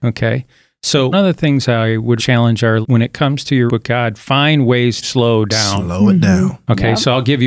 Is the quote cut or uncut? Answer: cut